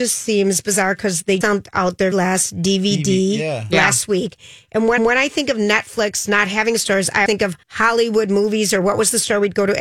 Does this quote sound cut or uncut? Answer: cut